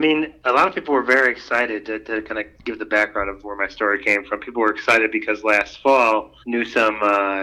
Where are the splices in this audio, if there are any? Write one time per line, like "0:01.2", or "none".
0:06.4